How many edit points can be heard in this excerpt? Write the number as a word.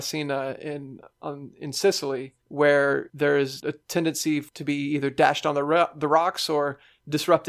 zero